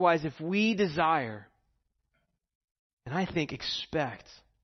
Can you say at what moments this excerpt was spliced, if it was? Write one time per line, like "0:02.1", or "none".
none